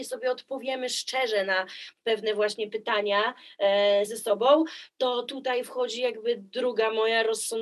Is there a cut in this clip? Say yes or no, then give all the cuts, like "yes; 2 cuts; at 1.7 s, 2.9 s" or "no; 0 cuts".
yes; 1 cut; at 4.1 s